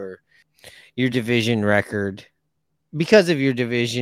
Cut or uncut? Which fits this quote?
uncut